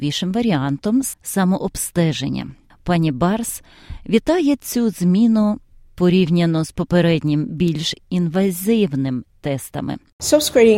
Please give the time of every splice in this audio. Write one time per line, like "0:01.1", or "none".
none